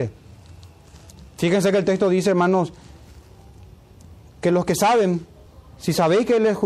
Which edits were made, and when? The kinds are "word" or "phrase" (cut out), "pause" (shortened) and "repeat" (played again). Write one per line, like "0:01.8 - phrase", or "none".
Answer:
0:05.5 - pause